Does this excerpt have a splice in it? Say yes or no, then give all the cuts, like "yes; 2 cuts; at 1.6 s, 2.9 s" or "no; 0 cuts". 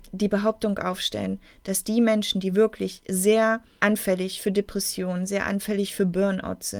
no; 0 cuts